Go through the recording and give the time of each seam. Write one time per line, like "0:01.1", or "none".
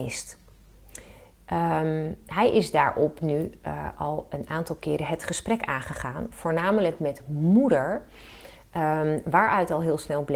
none